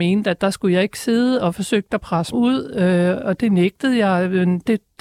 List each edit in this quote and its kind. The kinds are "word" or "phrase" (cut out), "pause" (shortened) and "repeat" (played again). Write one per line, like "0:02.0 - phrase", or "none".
0:02.3 - word